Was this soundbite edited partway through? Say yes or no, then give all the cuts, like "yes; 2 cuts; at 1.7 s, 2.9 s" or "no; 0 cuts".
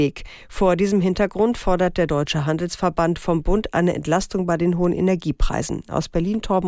no; 0 cuts